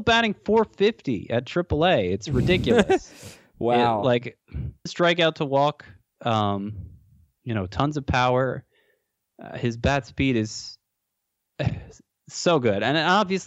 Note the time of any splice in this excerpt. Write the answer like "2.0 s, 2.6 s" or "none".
4.9 s, 6.2 s